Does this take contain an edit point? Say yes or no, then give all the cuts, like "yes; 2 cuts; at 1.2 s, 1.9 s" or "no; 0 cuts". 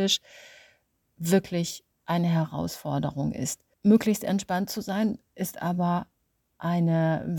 yes; 1 cut; at 3.7 s